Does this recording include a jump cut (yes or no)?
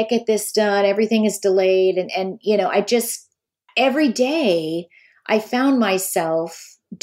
no